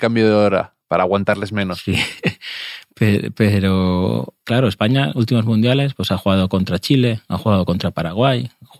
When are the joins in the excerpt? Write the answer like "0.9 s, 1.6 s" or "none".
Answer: 4.4 s